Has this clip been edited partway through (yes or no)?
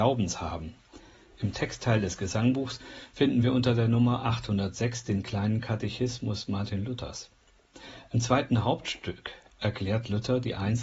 no